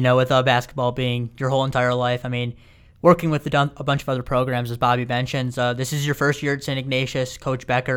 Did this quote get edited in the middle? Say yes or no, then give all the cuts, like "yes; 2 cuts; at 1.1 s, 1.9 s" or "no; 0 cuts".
no; 0 cuts